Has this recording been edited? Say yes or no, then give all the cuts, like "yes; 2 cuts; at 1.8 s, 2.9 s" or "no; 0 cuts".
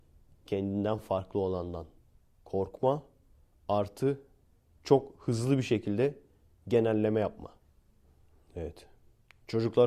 no; 0 cuts